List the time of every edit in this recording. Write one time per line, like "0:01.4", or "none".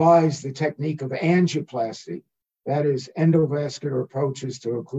none